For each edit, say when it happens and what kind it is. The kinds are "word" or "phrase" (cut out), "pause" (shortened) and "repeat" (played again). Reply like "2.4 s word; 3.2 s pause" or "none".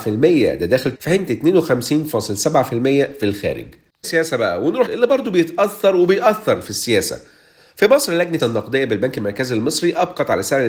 0.9 s word; 1.3 s word; 4.0 s word; 4.9 s word; 8.4 s word